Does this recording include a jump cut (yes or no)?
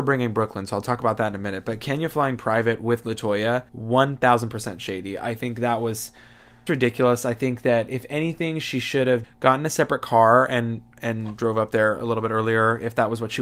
yes